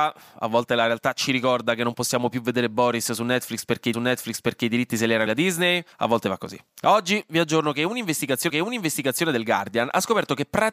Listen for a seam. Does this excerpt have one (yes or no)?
yes